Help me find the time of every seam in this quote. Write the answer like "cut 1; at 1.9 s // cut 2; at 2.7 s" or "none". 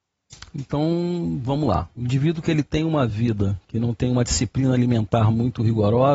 none